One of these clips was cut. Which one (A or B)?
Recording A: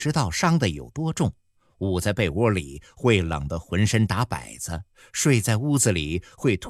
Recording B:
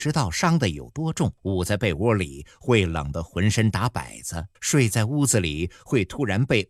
B